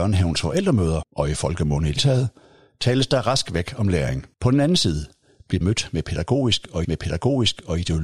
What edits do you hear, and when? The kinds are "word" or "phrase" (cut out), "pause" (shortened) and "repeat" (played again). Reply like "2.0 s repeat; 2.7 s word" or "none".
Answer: 1.0 s word; 2.0 s word; 4.3 s pause; 5.6 s word; 6.8 s repeat